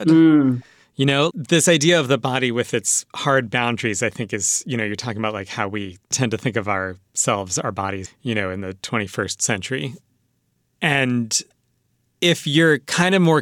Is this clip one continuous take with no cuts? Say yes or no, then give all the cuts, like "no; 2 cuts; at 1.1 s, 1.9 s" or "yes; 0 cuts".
no; 3 cuts; at 1.3 s, 6.0 s, 8.0 s